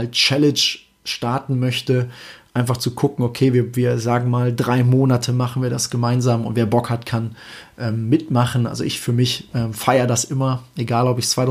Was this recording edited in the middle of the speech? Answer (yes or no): no